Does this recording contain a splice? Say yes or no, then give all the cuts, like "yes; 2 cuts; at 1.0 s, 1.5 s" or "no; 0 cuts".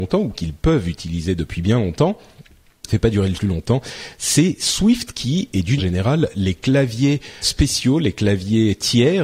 yes; 4 cuts; at 2.9 s, 3.3 s, 5.8 s, 7.4 s